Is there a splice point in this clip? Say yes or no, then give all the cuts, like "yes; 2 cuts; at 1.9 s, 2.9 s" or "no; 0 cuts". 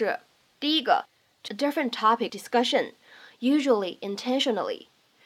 yes; 2 cuts; at 1.5 s, 2.3 s